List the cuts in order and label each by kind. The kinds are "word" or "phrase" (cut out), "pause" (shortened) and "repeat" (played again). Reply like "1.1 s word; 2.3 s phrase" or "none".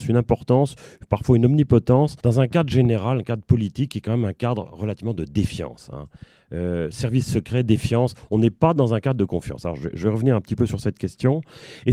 2.2 s pause